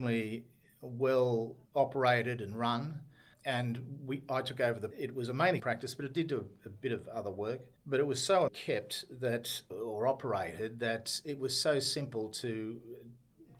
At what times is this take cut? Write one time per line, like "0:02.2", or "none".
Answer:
0:01.7
0:03.3
0:04.9
0:05.6
0:07.8
0:08.5
0:09.7

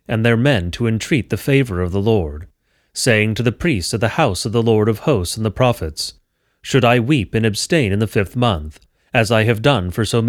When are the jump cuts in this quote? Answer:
none

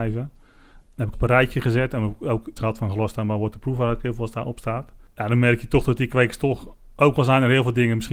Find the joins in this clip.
0:01.1
0:02.6

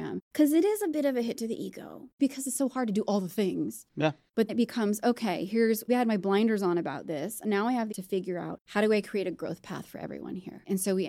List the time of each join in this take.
0:04.5
0:05.9
0:07.9

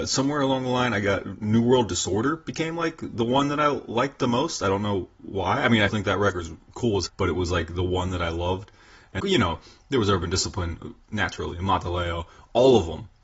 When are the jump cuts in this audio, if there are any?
0:05.9
0:07.1
0:09.2

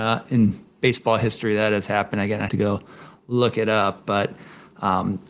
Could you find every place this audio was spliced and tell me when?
0:02.5

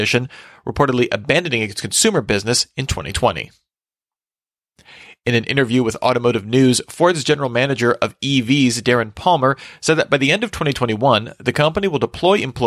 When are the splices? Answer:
none

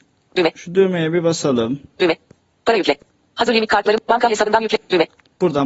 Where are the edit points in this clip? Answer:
none

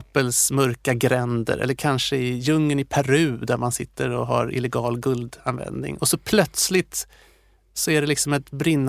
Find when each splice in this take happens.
none

